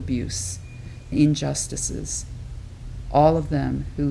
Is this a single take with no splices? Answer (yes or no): no